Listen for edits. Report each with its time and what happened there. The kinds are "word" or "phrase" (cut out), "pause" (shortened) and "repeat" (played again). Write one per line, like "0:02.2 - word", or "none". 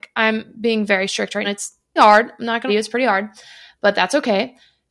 0:01.4 - word
0:02.0 - word
0:02.7 - phrase